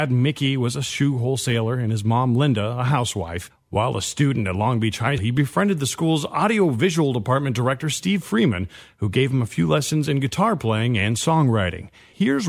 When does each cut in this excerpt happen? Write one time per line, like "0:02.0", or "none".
0:05.2